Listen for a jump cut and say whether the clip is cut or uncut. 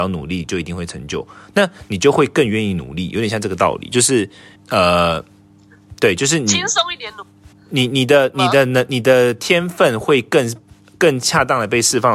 cut